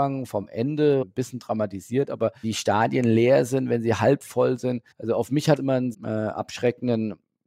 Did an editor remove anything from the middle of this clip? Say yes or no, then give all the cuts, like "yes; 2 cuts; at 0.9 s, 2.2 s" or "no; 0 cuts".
yes; 5 cuts; at 1.0 s, 2.4 s, 4.9 s, 5.6 s, 5.9 s